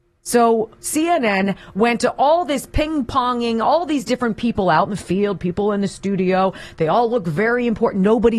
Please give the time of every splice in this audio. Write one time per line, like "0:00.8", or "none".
none